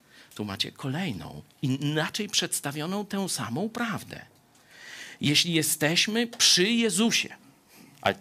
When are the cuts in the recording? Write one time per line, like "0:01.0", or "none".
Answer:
0:01.5